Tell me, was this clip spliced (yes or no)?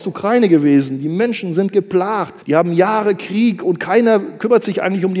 yes